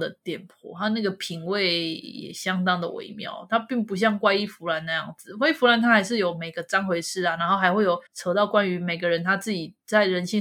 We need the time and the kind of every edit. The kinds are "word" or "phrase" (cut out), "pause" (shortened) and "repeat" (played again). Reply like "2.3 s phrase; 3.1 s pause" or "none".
8.1 s pause